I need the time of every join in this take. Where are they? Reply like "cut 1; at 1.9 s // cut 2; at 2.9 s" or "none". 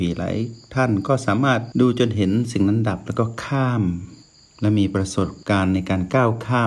cut 1; at 4.2 s